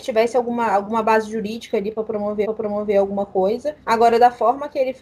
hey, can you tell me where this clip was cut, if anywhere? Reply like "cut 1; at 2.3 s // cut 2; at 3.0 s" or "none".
cut 1; at 2.4 s // cut 2; at 3.8 s